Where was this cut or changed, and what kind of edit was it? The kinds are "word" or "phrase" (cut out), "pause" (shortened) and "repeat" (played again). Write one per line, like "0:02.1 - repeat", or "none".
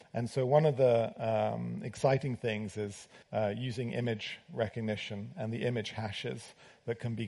0:03.2 - pause